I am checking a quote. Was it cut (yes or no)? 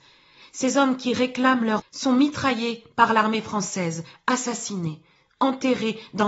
yes